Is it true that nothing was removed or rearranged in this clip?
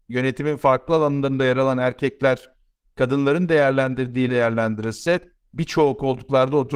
no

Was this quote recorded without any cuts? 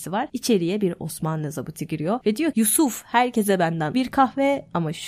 no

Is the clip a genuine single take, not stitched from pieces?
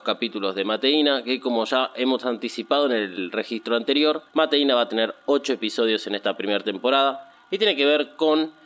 no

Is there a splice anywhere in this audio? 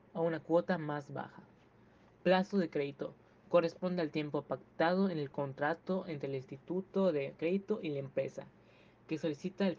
no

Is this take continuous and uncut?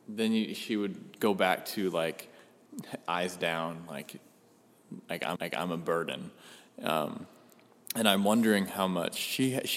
no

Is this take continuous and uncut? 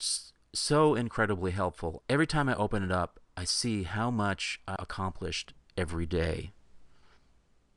no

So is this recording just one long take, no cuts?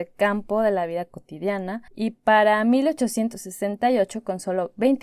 no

